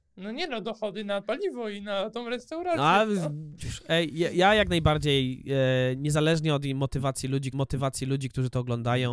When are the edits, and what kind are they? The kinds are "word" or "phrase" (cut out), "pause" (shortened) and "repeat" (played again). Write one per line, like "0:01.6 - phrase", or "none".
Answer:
0:01.2 - word
0:03.6 - phrase
0:07.5 - repeat